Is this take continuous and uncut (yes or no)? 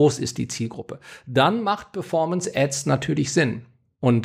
yes